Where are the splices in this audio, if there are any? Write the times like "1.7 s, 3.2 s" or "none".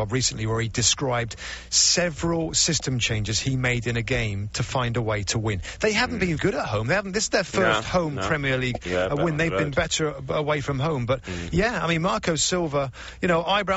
6.4 s